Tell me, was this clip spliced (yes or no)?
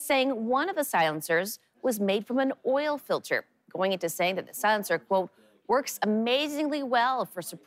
no